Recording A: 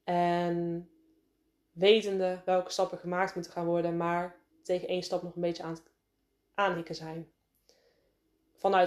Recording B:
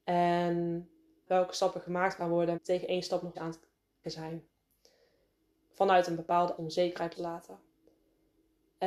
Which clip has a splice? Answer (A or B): B